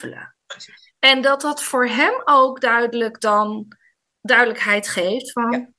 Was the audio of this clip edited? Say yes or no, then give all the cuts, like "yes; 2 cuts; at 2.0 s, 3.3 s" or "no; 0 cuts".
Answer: no; 0 cuts